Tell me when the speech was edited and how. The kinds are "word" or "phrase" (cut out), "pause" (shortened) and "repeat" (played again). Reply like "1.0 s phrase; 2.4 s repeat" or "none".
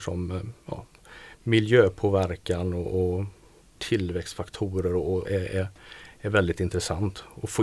3.6 s pause; 5.3 s phrase